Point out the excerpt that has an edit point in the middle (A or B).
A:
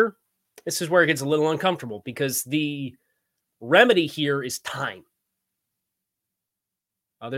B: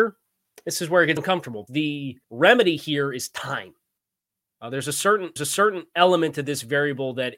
B